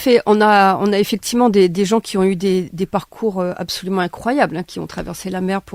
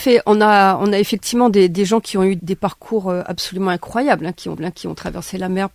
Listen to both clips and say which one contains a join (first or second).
second